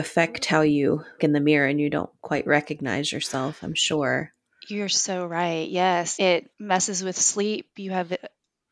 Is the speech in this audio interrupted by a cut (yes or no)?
yes